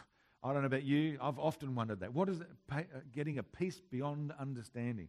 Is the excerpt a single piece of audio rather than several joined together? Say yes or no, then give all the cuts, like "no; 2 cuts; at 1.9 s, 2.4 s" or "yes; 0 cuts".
yes; 0 cuts